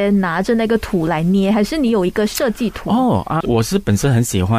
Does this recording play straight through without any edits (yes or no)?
no